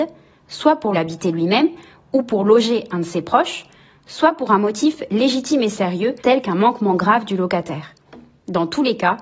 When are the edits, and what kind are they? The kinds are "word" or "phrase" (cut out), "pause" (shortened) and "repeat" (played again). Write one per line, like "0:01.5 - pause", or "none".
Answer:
0:00.9 - phrase
0:06.2 - pause